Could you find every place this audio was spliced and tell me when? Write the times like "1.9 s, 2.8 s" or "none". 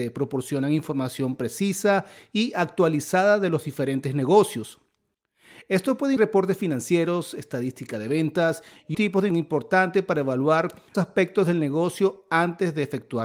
6.2 s, 8.9 s, 9.3 s, 10.9 s